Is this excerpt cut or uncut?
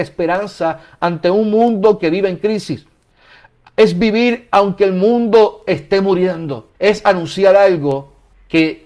cut